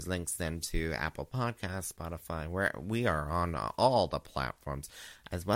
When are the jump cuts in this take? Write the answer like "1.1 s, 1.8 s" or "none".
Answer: none